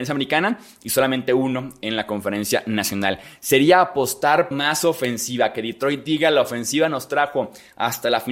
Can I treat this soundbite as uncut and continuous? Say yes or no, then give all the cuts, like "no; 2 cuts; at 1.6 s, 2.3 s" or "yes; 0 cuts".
no; 1 cut; at 4.5 s